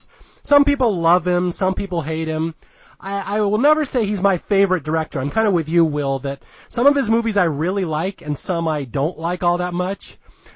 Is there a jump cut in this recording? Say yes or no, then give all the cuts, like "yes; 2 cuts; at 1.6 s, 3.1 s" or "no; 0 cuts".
no; 0 cuts